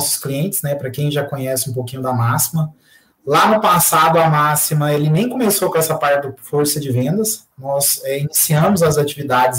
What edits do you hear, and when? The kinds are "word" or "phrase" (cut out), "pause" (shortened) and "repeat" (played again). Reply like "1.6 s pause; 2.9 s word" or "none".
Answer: none